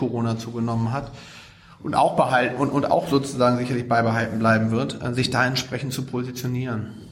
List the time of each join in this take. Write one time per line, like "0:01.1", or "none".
none